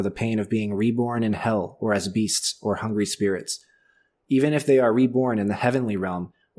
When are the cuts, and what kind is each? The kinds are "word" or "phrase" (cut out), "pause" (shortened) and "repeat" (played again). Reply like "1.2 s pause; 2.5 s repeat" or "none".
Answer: none